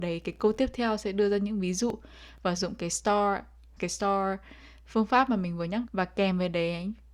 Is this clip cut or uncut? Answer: cut